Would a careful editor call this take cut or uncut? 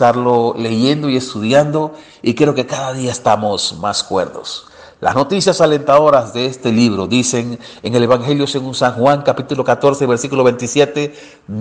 uncut